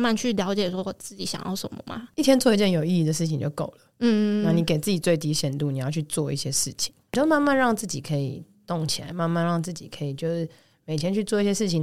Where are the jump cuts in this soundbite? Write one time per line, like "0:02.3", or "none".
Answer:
none